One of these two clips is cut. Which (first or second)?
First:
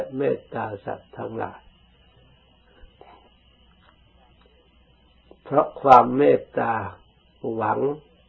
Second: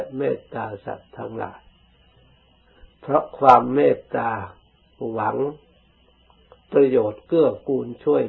second